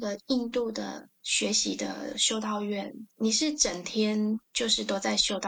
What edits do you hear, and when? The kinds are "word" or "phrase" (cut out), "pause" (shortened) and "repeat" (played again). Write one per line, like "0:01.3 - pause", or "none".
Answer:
0:03.1 - pause